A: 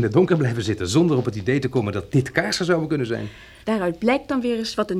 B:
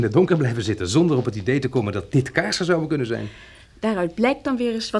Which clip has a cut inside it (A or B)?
A